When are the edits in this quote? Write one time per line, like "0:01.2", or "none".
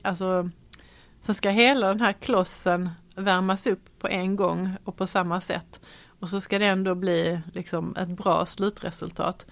none